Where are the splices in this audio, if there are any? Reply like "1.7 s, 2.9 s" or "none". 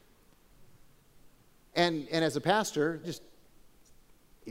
3.0 s